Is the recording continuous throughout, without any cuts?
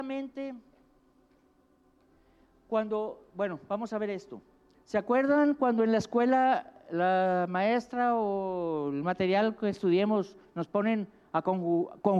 yes; 0 cuts

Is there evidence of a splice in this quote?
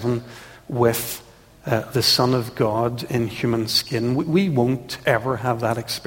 no; 0 cuts

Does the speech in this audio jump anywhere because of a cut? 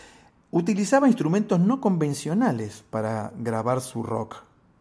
no; 0 cuts

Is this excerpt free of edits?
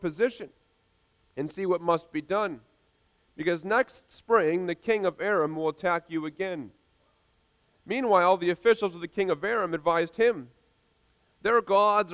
yes; 0 cuts

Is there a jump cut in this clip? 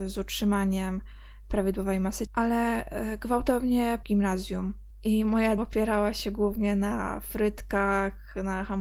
yes; 3 cuts; at 2.3 s, 4.0 s, 5.6 s

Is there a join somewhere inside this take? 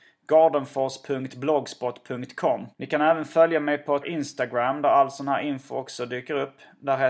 yes; 2 cuts; at 2.7 s, 4.0 s

